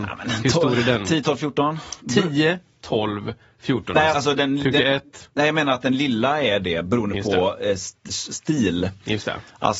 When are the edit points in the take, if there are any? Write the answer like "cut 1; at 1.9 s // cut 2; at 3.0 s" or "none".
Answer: cut 1; at 2.0 s // cut 2; at 4.1 s // cut 3; at 8.1 s